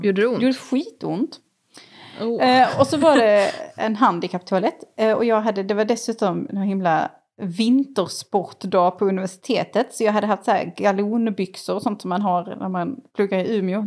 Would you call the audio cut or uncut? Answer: uncut